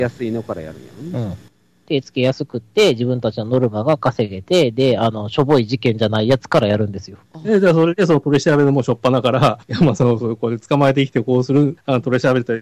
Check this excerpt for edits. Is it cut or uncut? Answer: cut